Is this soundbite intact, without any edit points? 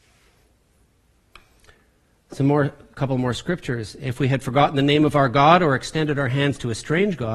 yes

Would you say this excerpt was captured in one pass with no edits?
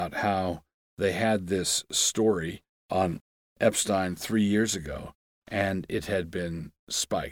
yes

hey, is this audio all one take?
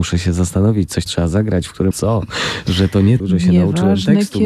no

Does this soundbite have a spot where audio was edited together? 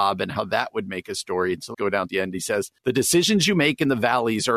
yes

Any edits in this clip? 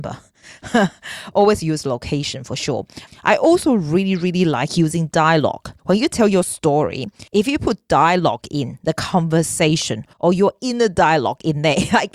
yes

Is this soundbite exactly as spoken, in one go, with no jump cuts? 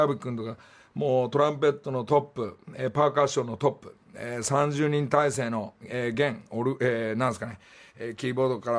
yes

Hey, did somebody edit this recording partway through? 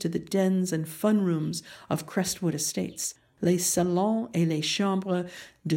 no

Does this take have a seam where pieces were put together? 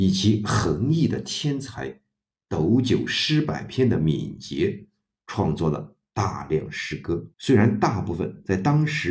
yes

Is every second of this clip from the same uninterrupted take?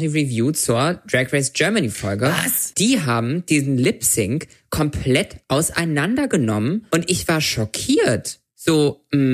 yes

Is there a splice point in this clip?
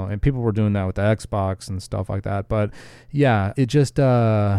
yes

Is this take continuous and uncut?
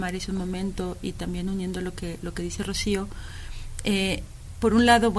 yes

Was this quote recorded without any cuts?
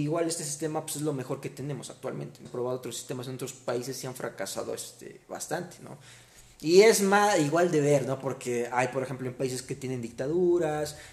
no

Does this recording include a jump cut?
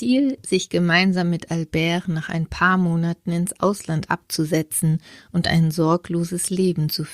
no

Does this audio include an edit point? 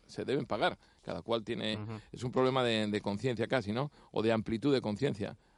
no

